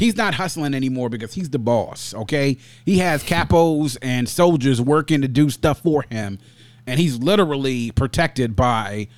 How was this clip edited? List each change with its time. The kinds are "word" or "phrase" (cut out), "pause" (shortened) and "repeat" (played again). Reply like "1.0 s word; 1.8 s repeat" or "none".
none

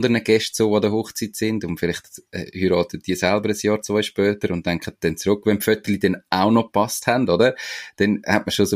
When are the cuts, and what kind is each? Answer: none

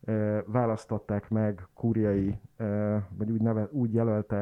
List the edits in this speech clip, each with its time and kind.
none

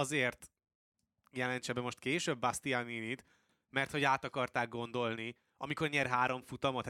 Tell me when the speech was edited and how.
none

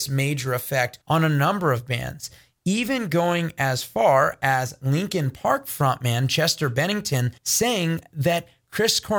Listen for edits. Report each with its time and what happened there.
1.0 s pause; 7.4 s pause

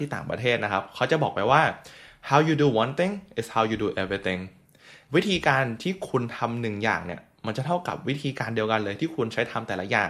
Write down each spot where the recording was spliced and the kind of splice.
none

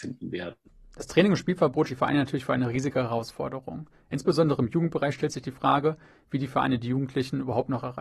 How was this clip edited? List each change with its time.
1.9 s word

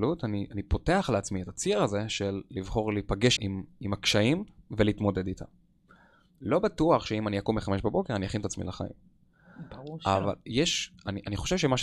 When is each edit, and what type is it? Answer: 3.4 s word

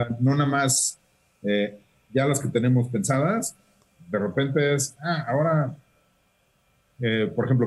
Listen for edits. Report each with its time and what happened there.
none

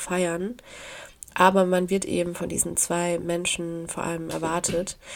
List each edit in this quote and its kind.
none

